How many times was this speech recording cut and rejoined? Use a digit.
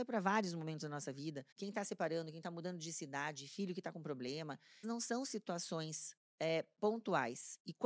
2